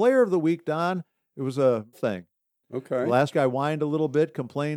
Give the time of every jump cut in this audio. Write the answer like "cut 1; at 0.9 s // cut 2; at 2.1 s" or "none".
cut 1; at 1.9 s // cut 2; at 3.3 s